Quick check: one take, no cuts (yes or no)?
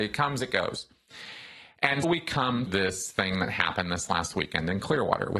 no